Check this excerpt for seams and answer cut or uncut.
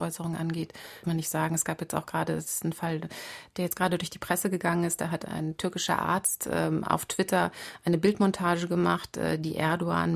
cut